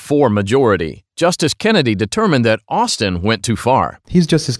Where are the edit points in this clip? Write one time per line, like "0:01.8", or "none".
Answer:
none